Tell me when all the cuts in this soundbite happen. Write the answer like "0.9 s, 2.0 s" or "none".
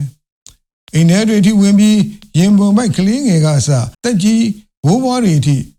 3.9 s